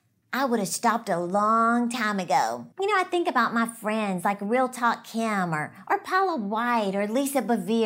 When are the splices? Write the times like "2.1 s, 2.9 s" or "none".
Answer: 2.7 s